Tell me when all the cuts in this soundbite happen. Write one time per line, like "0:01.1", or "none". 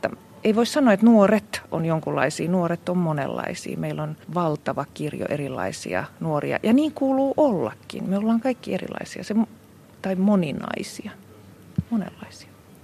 0:04.2